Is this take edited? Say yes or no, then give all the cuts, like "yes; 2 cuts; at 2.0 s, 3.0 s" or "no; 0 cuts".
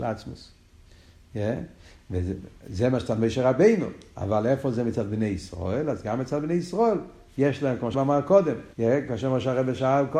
yes; 2 cuts; at 7.9 s, 8.7 s